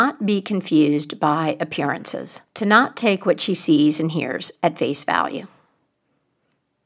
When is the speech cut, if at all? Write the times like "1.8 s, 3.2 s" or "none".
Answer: 2.5 s

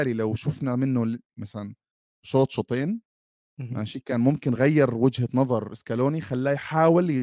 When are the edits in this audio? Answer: none

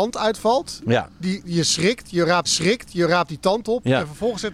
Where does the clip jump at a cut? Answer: 2.4 s

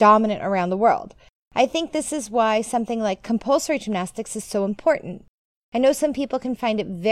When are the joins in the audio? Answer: none

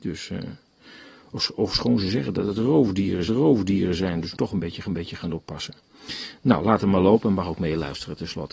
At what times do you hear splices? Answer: 3.3 s, 4.3 s, 4.8 s

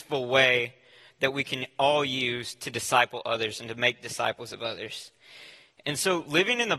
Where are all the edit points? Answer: none

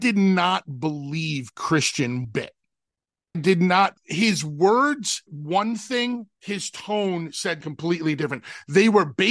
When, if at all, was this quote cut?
2.2 s, 3.3 s, 4.0 s, 5.3 s, 6.3 s, 7.6 s

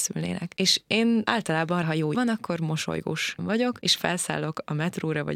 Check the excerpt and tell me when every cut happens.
1.8 s, 2.1 s, 3.4 s, 4.0 s

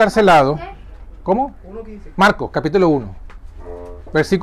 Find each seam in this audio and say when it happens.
none

